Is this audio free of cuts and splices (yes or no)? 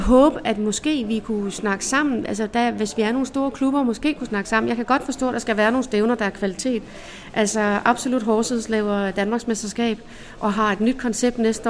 yes